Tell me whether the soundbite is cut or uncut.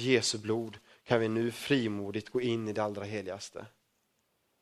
uncut